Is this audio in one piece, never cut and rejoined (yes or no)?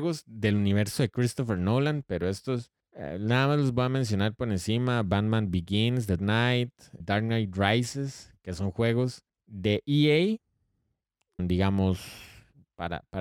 no